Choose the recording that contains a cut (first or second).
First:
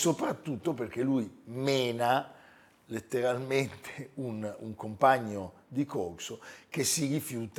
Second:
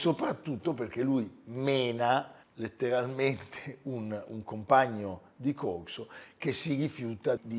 second